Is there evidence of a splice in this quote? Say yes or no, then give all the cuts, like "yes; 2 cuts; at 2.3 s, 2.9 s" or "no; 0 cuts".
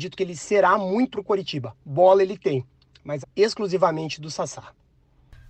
yes; 2 cuts; at 1.1 s, 3.2 s